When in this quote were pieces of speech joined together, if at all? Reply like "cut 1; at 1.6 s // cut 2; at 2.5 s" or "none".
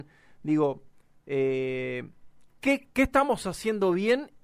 none